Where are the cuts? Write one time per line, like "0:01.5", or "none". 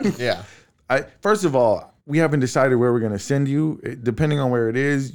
0:02.0